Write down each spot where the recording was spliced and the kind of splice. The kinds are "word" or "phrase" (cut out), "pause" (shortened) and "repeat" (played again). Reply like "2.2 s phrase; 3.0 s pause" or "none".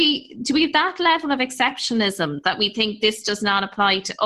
none